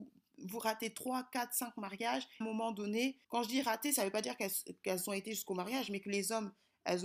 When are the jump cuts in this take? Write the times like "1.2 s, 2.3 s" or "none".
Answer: 2.4 s, 3.2 s